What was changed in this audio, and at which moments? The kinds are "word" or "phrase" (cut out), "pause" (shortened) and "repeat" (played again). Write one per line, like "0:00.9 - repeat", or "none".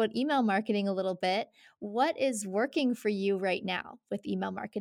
none